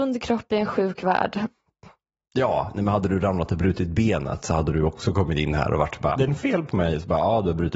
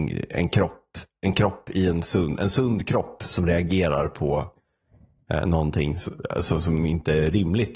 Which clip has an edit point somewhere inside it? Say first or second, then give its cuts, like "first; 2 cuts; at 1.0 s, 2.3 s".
first; 1 cut; at 6.2 s